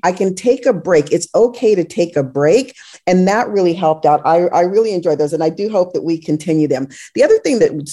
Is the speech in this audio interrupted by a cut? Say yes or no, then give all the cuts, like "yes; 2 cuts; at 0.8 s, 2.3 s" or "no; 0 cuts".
no; 0 cuts